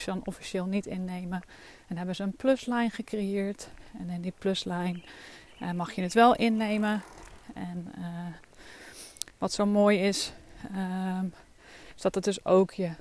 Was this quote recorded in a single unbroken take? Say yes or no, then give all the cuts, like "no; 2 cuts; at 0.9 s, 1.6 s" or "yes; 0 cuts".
yes; 0 cuts